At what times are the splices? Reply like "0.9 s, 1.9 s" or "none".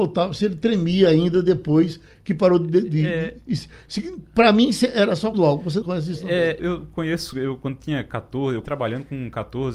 5.3 s, 5.8 s, 6.6 s, 8.6 s